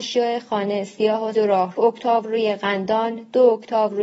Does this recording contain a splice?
yes; 2 cuts; at 1.3 s, 1.8 s

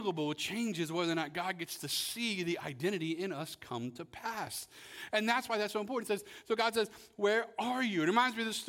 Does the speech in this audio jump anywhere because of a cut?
no; 0 cuts

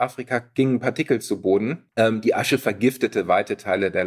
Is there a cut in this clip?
yes; 1 cut; at 1.9 s

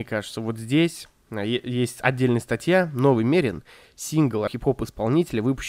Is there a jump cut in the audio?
yes; 1 cut; at 4.5 s

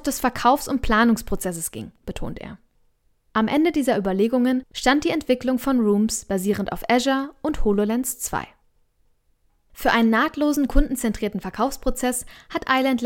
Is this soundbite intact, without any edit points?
yes; 0 cuts

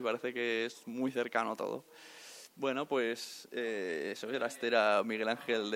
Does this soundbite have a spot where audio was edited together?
no; 0 cuts

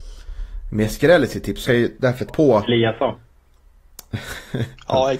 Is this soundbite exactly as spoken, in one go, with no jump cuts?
no; 2 cuts; at 1.6 s, 2.3 s

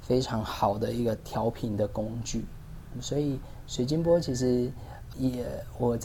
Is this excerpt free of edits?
no; 1 cut; at 5.1 s

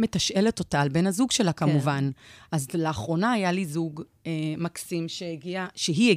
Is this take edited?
no; 0 cuts

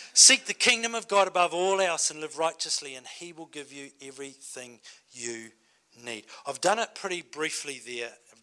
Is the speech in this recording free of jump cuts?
yes; 0 cuts

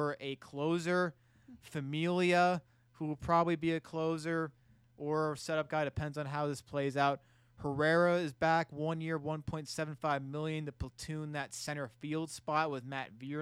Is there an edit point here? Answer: no; 0 cuts

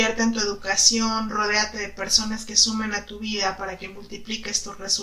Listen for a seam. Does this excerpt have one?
no; 0 cuts

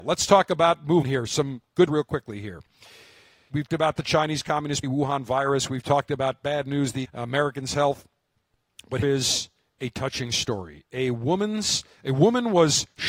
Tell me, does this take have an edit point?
yes; 6 cuts; at 1.0 s, 1.9 s, 3.7 s, 4.8 s, 7.1 s, 9.0 s

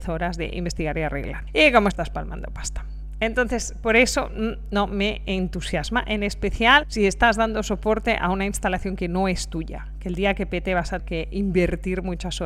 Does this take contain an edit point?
yes; 2 cuts; at 1.9 s, 11.0 s

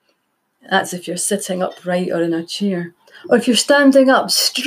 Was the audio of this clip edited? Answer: no; 0 cuts

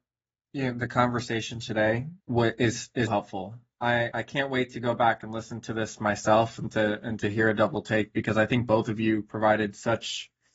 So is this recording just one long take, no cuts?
no; 3 cuts; at 2.2 s, 3.1 s, 4.1 s

